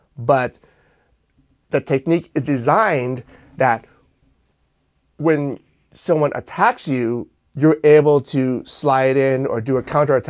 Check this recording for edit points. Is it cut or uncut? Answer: uncut